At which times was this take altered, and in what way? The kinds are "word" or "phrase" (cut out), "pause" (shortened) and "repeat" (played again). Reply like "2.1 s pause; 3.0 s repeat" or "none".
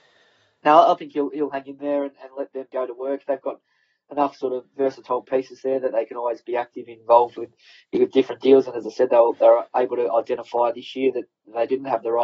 9.7 s pause